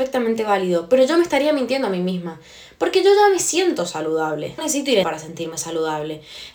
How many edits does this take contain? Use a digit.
2